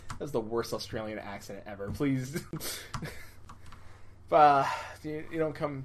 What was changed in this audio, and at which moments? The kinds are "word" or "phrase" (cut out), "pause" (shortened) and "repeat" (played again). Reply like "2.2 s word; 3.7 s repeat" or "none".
none